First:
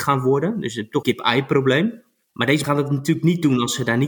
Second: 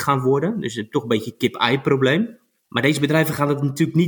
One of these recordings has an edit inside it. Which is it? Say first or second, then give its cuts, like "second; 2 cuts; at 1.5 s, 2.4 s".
first; 2 cuts; at 1.0 s, 2.6 s